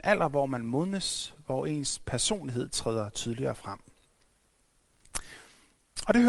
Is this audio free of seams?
yes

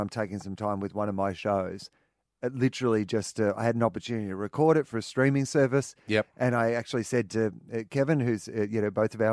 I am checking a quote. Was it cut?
no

